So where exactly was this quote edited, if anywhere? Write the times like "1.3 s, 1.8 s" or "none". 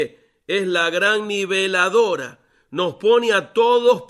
none